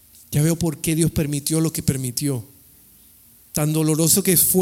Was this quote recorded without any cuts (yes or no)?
yes